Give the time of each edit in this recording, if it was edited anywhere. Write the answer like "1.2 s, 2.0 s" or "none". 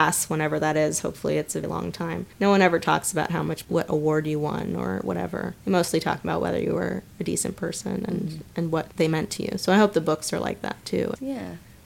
1.6 s, 2.3 s, 3.6 s, 5.6 s, 8.9 s